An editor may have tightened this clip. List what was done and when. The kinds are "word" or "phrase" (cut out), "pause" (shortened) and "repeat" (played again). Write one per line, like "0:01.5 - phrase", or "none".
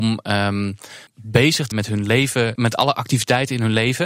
0:01.1 - phrase
0:01.7 - word
0:02.6 - word